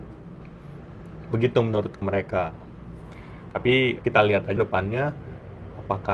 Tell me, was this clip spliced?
yes; 3 cuts; at 2.0 s, 4.0 s, 4.6 s

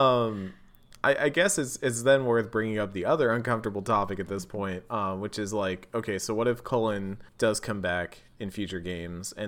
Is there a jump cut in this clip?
yes; 1 cut; at 7.3 s

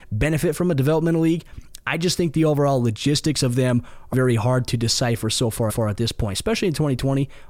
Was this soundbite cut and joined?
yes; 2 cuts; at 4.1 s, 5.7 s

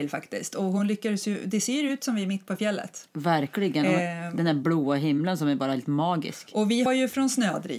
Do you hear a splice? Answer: yes; 1 cut; at 6.9 s

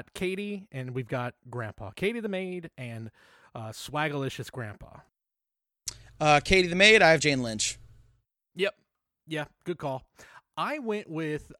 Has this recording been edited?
no; 0 cuts

